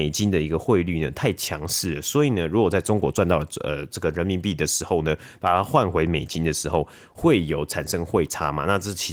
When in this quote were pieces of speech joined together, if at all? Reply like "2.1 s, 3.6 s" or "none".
none